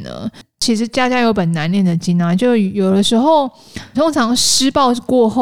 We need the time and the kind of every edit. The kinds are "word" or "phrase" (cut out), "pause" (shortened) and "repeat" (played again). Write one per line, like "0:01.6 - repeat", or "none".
0:03.9 - word